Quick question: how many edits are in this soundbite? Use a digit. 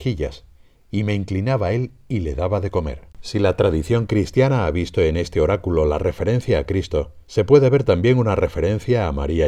2